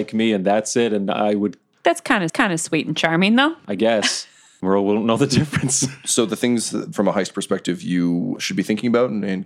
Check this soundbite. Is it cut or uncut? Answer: cut